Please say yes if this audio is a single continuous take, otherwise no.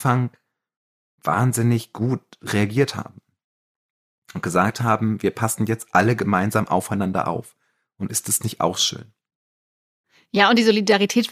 yes